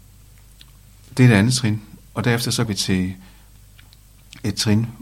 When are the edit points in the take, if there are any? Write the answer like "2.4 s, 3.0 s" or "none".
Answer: 2.1 s, 2.7 s